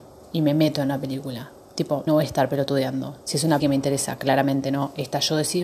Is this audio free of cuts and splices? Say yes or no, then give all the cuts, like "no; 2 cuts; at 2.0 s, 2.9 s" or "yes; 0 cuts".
no; 3 cuts; at 2.1 s, 3.2 s, 3.6 s